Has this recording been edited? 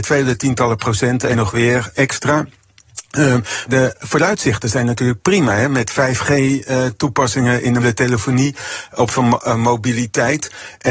yes; 5 cuts; at 1.3 s, 1.9 s, 3.7 s, 7.8 s, 9.1 s

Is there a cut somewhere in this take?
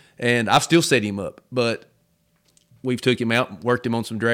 no; 0 cuts

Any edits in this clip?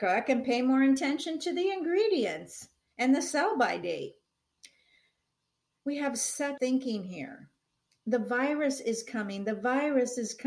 yes; 1 cut; at 6.6 s

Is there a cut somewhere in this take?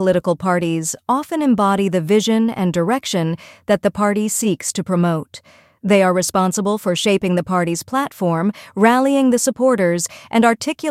no; 0 cuts

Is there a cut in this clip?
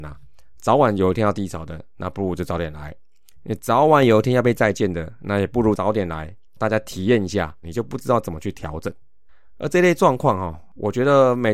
yes; 2 cuts; at 6.4 s, 7.6 s

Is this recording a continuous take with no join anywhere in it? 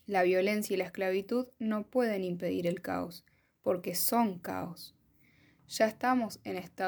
yes; 0 cuts

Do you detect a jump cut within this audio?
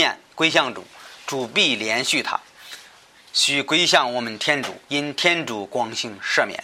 yes; 1 cut; at 4.8 s

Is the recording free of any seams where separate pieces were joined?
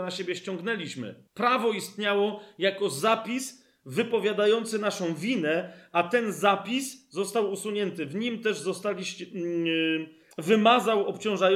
no; 2 cuts; at 1.3 s, 10.3 s

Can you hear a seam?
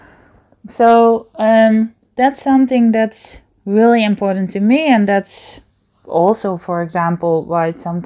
no; 0 cuts

